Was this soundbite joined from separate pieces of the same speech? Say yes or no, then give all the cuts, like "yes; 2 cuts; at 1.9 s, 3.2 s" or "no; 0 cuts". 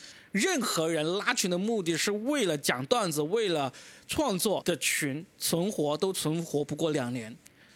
no; 0 cuts